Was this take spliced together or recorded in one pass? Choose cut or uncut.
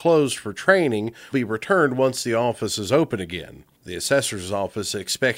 cut